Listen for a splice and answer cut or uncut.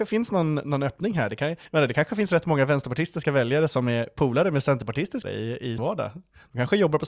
cut